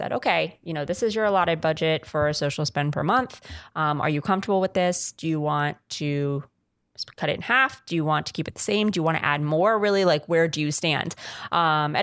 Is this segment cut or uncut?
uncut